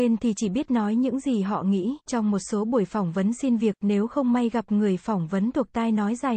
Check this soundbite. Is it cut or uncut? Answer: cut